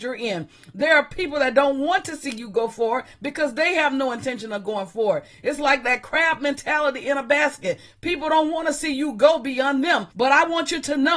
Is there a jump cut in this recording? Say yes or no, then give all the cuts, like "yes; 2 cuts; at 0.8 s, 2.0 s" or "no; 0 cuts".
yes; 1 cut; at 10.1 s